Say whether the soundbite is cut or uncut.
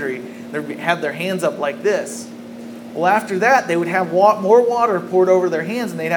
uncut